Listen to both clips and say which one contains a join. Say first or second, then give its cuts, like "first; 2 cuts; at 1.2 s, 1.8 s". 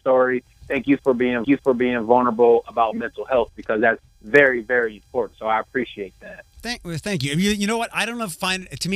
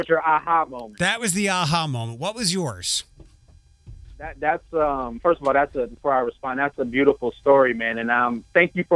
first; 2 cuts; at 1.4 s, 4.1 s